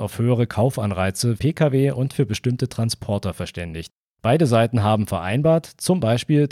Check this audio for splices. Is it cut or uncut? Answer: cut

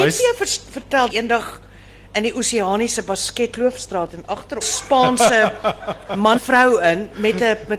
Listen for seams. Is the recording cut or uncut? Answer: cut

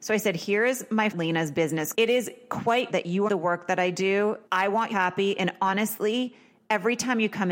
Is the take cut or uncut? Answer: cut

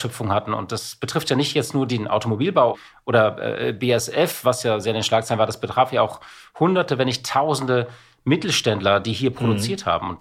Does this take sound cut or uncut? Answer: uncut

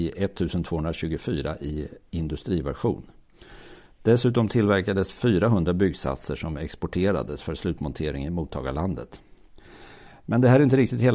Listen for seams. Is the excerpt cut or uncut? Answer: uncut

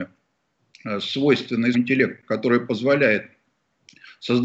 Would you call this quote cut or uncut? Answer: cut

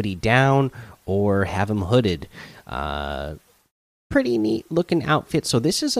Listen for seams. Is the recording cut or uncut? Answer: uncut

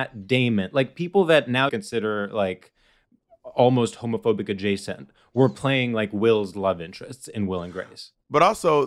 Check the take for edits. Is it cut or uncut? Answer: cut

